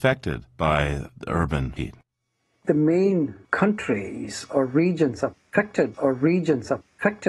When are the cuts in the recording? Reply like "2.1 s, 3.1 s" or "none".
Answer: 1.8 s, 5.9 s